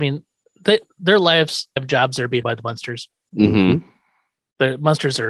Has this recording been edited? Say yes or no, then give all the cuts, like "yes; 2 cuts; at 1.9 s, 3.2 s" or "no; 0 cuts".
yes; 2 cuts; at 1.8 s, 2.4 s